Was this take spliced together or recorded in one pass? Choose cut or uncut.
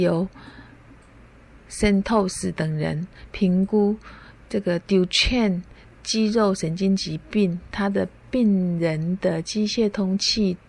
cut